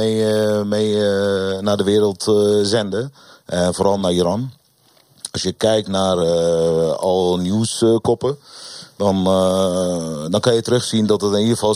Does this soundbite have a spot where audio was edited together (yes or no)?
no